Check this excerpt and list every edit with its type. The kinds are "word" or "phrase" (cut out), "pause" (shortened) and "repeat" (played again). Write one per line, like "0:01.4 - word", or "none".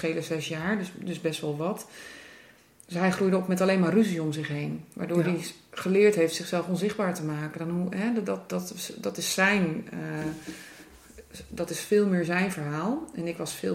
none